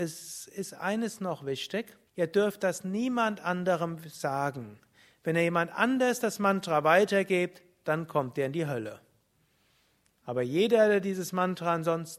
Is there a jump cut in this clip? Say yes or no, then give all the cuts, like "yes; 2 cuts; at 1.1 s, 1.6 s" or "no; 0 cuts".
yes; 1 cut; at 2.1 s